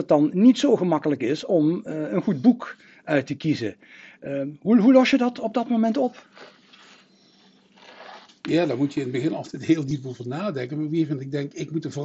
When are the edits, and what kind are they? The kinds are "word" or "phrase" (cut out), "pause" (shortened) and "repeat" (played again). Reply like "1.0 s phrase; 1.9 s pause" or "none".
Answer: none